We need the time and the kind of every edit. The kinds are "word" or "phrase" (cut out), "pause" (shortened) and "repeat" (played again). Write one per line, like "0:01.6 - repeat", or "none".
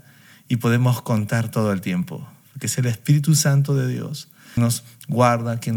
0:04.6 - word

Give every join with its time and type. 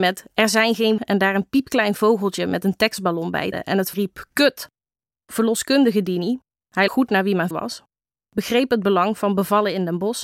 0:01.0 - phrase
0:03.5 - word
0:03.9 - word
0:04.9 - pause
0:06.9 - word
0:07.5 - word

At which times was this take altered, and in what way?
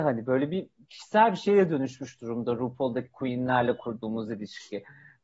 none

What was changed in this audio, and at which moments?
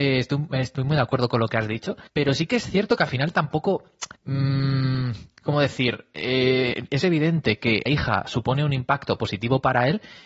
0:02.1 - pause
0:04.1 - pause
0:07.9 - word

